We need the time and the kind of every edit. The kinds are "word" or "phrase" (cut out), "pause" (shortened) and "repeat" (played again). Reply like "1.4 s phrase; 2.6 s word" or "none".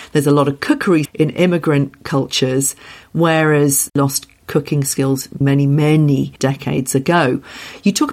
1.1 s word; 3.9 s word; 5.4 s word; 6.4 s pause

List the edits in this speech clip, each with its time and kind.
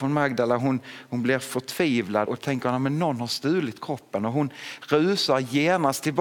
2.3 s word

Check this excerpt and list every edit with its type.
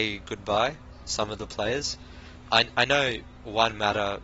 1.0 s word

